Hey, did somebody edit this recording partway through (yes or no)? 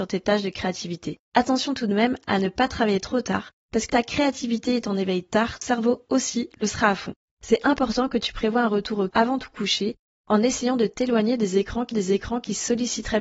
yes